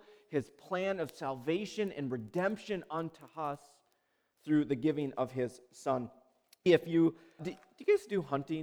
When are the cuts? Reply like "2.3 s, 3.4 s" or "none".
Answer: 6.7 s, 7.4 s